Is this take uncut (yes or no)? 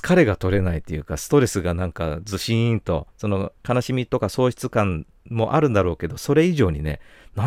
no